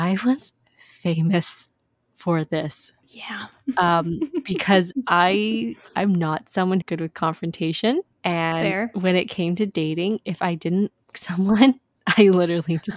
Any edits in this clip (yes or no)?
yes